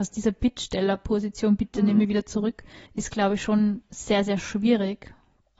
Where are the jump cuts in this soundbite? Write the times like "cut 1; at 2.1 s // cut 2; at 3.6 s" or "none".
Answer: cut 1; at 2.9 s